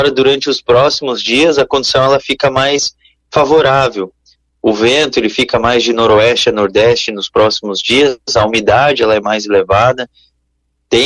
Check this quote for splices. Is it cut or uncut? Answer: uncut